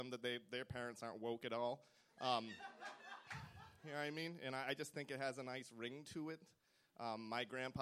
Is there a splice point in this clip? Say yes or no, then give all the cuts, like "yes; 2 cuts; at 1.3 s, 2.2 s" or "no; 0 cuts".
no; 0 cuts